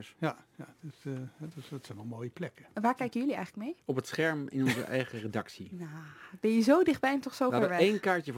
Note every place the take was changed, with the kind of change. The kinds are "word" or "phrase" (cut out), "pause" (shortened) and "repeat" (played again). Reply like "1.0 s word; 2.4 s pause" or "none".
3.8 s pause